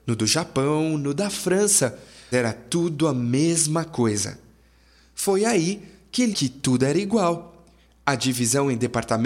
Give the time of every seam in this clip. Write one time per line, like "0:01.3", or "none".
0:02.3
0:06.3